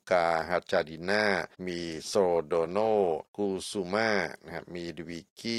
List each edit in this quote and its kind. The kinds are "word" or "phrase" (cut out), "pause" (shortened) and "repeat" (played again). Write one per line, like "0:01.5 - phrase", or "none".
0:01.5 - pause
0:03.3 - pause

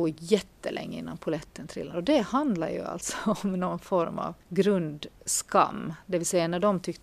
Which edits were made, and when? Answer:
0:01.9 - word
0:04.4 - pause

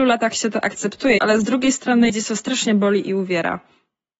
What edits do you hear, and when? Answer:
0:01.2 - word
0:02.1 - word

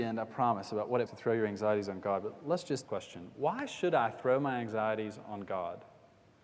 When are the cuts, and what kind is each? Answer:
0:01.1 - phrase
0:02.9 - phrase

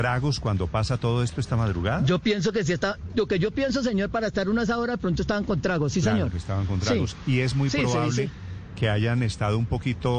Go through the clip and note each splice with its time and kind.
none

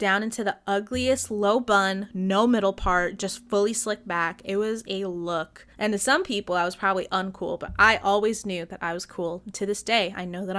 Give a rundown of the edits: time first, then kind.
0:05.7 - pause

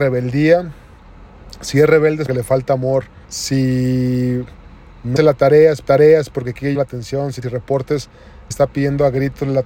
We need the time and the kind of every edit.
0:02.3 - phrase
0:03.2 - pause
0:05.2 - word
0:05.8 - repeat
0:06.7 - word
0:07.4 - phrase
0:08.5 - word

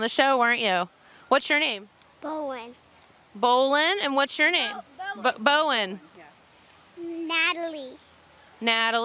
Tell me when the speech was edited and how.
none

